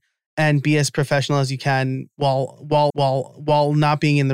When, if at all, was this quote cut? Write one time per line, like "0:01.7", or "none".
0:02.9